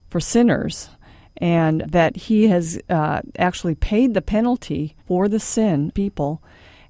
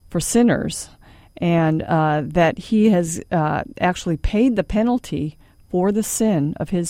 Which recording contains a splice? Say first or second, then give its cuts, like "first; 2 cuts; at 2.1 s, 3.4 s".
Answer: first; 3 cuts; at 1.8 s, 5.0 s, 5.9 s